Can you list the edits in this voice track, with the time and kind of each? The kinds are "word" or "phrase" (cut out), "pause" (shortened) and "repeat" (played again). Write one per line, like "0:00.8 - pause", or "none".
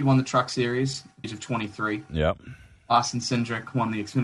0:01.2 - word